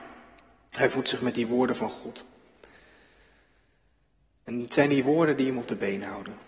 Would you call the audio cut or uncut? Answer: uncut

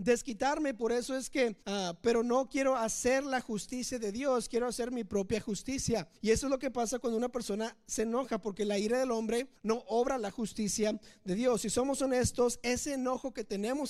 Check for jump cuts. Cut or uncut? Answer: cut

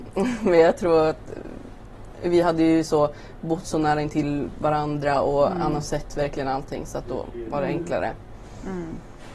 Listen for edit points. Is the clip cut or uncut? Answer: uncut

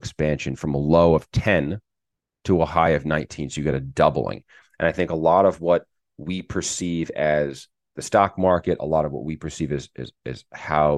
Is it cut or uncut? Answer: uncut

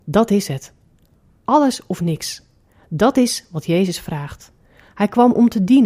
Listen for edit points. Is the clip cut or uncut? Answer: uncut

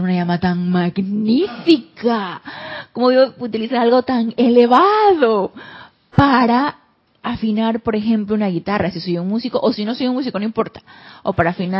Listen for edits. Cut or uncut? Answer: uncut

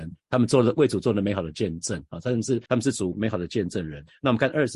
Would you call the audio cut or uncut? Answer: cut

